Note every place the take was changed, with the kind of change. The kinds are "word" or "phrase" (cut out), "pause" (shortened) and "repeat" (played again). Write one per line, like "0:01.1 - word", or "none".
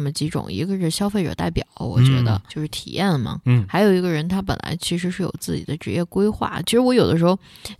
0:02.5 - word